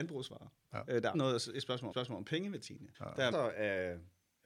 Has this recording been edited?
yes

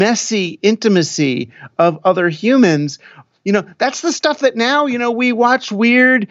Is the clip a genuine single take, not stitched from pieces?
yes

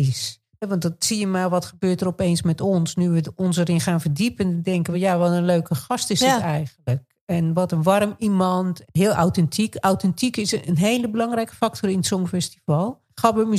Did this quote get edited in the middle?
no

